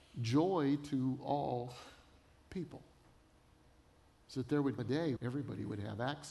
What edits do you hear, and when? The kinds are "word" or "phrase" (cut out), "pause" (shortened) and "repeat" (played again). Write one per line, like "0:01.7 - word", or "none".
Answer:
0:04.8 - word
0:05.2 - word